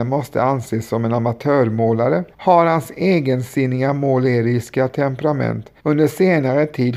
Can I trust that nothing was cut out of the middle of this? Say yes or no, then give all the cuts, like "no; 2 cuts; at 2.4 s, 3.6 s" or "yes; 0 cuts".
no; 2 cuts; at 2.3 s, 5.8 s